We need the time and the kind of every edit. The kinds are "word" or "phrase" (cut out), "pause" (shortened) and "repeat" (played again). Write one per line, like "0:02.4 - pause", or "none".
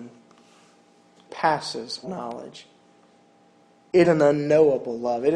0:01.3 - word
0:02.0 - word
0:04.0 - word